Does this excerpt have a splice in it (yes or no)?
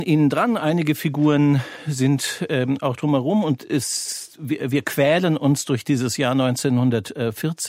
no